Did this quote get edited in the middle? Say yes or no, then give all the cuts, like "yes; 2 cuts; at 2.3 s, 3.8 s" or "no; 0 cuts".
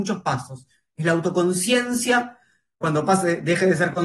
no; 0 cuts